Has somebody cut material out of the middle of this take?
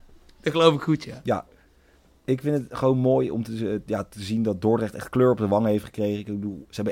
no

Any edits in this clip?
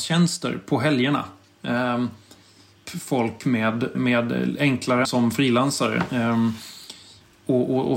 yes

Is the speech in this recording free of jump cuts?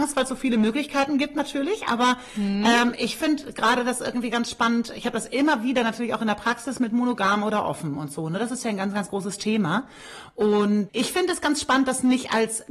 no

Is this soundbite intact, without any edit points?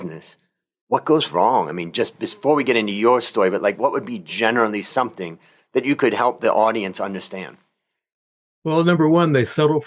yes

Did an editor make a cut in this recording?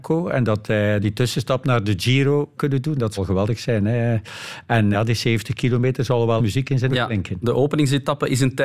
yes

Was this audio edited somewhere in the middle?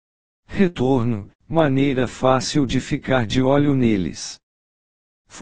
no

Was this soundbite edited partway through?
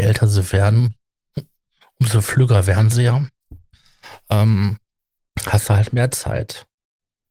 no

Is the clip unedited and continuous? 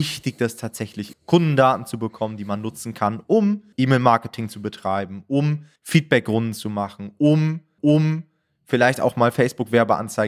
no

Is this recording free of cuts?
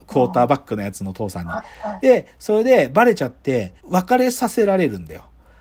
no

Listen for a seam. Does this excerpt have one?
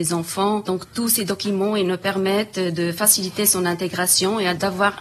no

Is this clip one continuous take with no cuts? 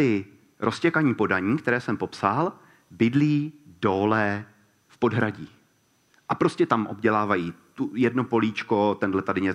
yes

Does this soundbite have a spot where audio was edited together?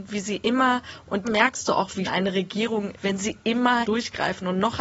yes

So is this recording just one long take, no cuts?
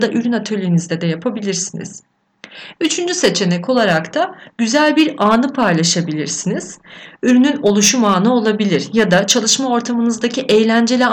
yes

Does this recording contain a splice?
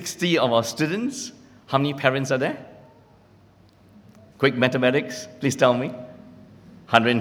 no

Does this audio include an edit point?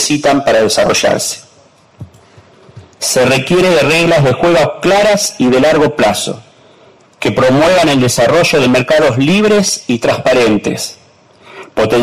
no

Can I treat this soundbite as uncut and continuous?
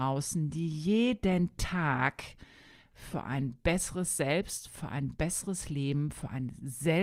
yes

